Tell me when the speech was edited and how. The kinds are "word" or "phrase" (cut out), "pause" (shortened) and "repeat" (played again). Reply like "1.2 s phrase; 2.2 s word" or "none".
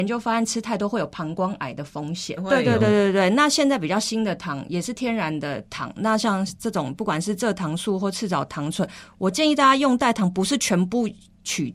2.4 s phrase